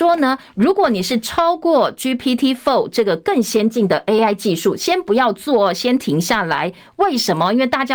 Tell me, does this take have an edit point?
no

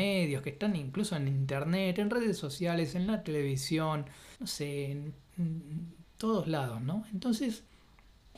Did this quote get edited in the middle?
yes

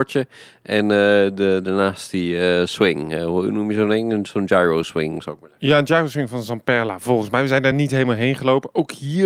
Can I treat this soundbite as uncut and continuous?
yes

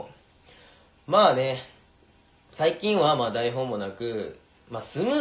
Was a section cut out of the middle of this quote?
no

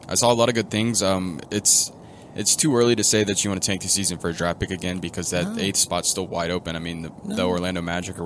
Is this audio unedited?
yes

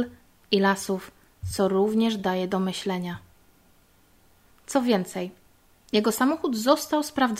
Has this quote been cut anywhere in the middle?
no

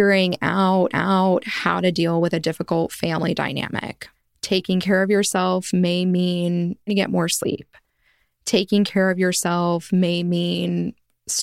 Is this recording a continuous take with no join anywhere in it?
no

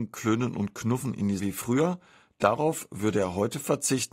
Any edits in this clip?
yes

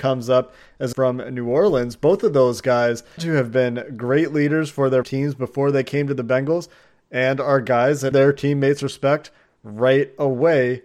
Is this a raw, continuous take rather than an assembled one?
no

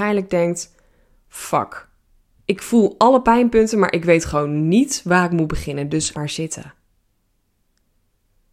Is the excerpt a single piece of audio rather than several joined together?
no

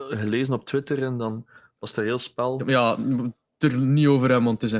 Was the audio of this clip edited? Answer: no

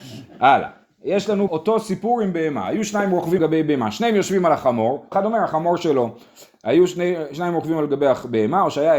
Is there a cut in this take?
yes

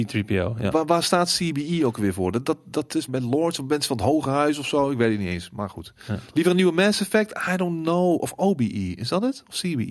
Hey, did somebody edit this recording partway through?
yes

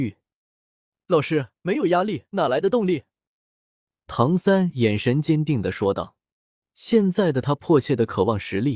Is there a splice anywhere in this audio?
yes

